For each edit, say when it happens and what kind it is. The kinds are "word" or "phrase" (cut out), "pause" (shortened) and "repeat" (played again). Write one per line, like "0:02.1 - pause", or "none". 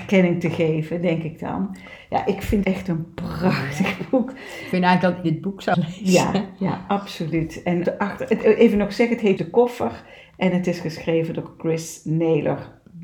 0:02.6 - word
0:05.2 - word
0:05.7 - word
0:07.8 - word
0:09.4 - word